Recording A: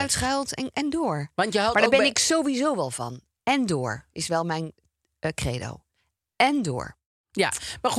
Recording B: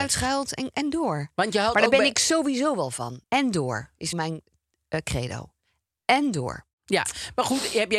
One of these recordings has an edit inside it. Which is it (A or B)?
B